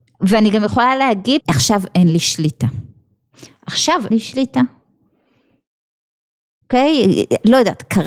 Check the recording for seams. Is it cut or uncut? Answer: cut